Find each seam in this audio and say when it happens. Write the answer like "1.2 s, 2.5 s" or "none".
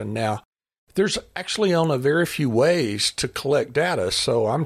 none